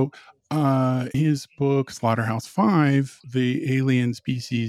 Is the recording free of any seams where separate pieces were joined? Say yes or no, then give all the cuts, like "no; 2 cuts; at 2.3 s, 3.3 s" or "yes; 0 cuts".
no; 2 cuts; at 1.1 s, 3.2 s